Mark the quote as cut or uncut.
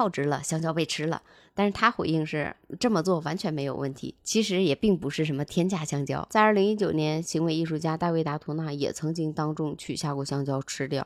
uncut